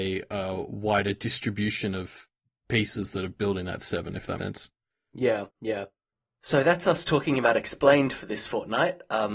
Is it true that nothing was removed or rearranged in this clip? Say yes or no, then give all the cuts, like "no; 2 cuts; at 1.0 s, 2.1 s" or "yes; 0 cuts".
no; 2 cuts; at 4.4 s, 5.5 s